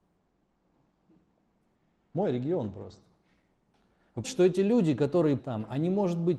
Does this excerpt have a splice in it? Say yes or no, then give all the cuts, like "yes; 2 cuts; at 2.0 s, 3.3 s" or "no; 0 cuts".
yes; 2 cuts; at 4.2 s, 5.4 s